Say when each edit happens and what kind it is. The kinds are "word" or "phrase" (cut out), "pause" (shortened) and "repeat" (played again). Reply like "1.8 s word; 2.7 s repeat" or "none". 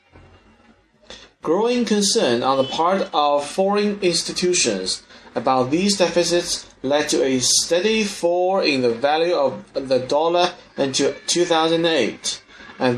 none